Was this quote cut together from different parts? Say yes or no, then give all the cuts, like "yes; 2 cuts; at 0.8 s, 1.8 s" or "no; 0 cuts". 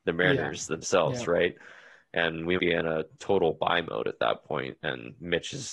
yes; 1 cut; at 2.6 s